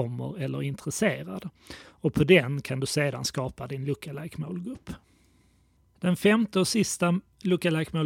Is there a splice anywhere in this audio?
no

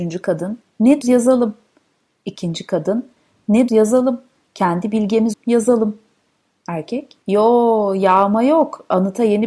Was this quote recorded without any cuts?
no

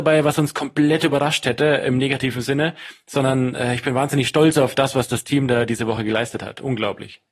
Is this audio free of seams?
yes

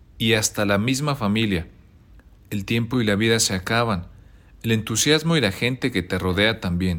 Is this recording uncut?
yes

